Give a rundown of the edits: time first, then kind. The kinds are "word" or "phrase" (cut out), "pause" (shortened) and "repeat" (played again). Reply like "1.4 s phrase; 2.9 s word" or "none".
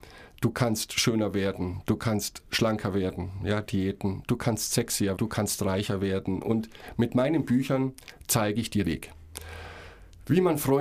5.2 s word; 8.8 s word